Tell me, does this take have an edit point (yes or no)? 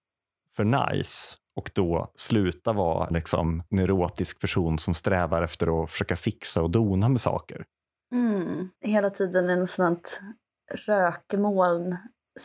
yes